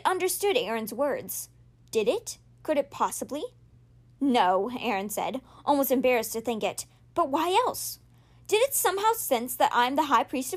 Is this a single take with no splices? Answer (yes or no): yes